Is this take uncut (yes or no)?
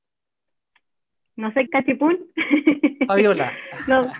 no